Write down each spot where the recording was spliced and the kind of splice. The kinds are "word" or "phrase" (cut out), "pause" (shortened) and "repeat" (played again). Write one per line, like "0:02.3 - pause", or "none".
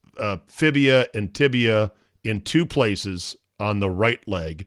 none